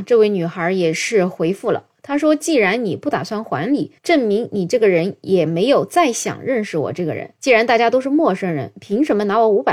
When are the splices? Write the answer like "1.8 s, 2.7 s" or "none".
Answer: 4.0 s, 7.3 s